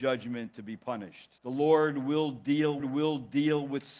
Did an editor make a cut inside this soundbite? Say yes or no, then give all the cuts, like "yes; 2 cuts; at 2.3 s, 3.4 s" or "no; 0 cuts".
yes; 2 cuts; at 1.4 s, 2.8 s